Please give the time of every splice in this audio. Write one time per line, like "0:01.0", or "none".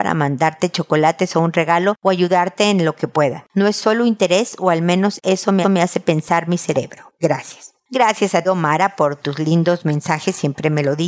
0:05.6
0:08.4